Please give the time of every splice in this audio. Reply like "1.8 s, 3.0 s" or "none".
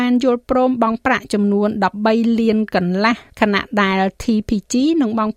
3.3 s